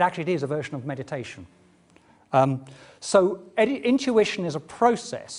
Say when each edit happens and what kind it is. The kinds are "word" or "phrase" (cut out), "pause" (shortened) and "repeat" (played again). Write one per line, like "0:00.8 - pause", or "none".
none